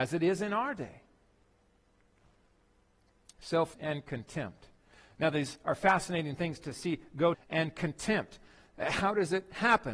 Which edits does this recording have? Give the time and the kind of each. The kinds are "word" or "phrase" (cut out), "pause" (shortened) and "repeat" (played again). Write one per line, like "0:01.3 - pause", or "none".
0:03.7 - word
0:07.3 - phrase